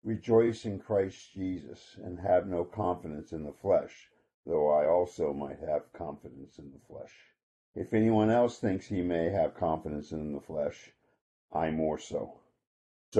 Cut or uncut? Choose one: uncut